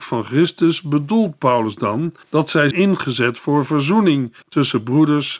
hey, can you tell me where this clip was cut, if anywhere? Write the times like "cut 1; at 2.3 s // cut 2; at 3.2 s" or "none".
cut 1; at 2.2 s // cut 2; at 2.7 s // cut 3; at 4.4 s